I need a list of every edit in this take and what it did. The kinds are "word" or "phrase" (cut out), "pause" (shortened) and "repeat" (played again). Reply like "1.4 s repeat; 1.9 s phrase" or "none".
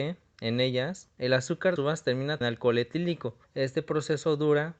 1.8 s phrase; 2.4 s phrase; 3.4 s pause